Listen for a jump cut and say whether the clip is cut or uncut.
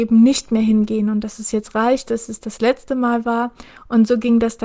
uncut